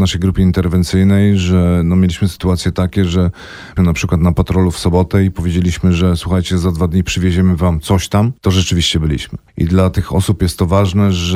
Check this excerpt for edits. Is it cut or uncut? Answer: cut